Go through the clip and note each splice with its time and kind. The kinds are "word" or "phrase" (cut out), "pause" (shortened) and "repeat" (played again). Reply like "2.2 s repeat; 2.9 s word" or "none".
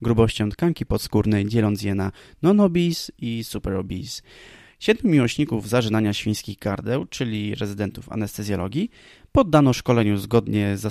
none

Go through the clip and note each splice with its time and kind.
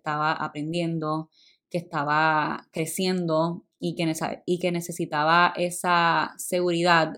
none

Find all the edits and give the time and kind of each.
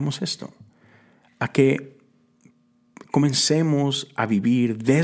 none

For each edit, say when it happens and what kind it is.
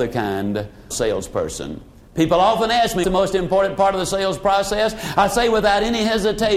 0.9 s word; 3.0 s word

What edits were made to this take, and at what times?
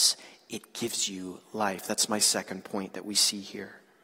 none

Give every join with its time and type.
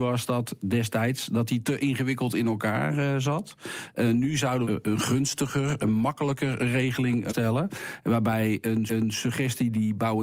4.6 s phrase; 7.3 s phrase; 8.9 s repeat

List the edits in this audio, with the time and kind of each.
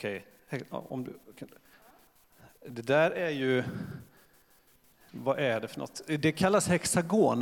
none

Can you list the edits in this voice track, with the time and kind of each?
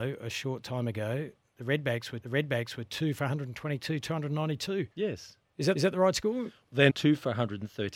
2.2 s repeat; 4.0 s word; 4.9 s pause; 5.7 s repeat; 6.9 s word

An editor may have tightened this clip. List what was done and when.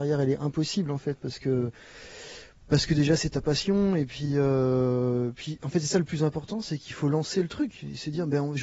none

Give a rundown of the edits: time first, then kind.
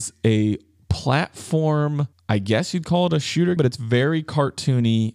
2.1 s pause; 3.6 s word

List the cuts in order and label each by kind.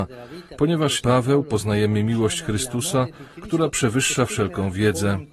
1.0 s phrase

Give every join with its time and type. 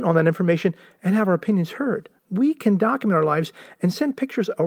2.2 s pause

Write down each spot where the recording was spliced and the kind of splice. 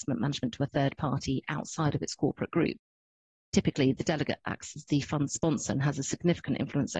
none

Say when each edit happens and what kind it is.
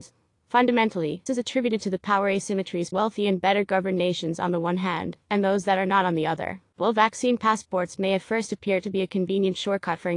1.3 s word; 2.9 s word; 6.7 s pause

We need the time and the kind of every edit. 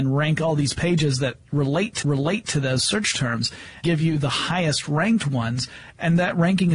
2.0 s repeat; 3.8 s word

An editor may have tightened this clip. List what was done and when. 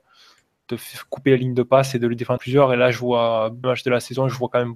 2.4 s word; 3.6 s phrase

